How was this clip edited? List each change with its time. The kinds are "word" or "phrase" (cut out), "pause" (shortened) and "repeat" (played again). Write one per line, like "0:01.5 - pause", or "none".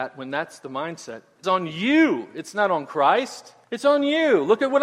0:01.4 - phrase
0:03.6 - pause